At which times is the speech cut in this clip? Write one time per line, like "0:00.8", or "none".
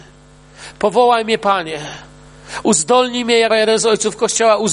0:03.5